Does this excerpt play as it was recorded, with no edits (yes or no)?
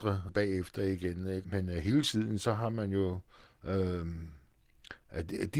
yes